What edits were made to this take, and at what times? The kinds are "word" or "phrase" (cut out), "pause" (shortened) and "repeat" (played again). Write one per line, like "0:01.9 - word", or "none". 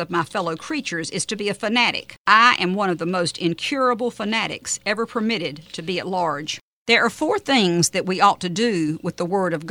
0:02.2 - pause